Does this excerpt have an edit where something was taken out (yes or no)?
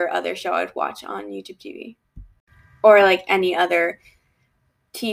no